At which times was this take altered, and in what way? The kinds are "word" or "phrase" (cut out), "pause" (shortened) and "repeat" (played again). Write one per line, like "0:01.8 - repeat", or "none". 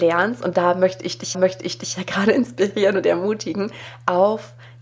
0:01.3 - repeat